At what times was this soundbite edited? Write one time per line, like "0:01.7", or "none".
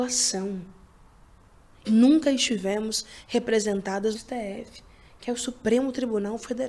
0:01.8
0:04.1